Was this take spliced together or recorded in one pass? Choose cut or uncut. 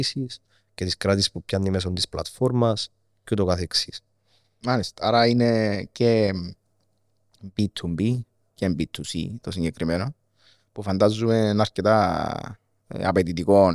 uncut